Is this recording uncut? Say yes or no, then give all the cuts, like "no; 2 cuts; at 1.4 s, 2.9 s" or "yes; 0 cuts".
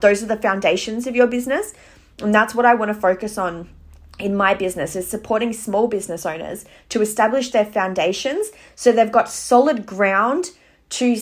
yes; 0 cuts